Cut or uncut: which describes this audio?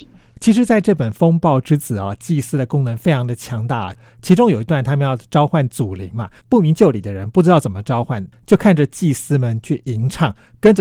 cut